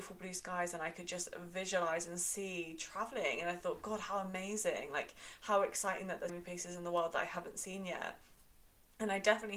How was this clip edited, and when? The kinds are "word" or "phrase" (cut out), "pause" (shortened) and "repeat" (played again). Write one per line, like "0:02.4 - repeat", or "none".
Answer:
0:06.3 - word